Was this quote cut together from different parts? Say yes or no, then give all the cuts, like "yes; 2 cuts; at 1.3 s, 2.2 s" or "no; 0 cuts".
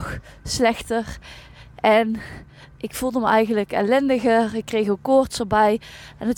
no; 0 cuts